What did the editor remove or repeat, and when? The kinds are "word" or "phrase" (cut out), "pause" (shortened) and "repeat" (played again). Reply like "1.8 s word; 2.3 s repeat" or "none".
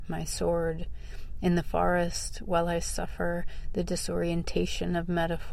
none